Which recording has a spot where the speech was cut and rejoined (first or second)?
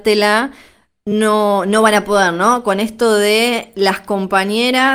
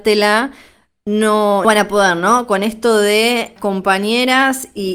second